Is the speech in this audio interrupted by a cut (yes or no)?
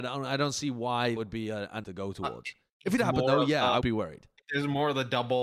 yes